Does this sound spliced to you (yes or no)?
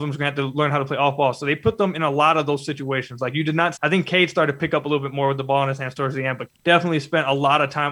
yes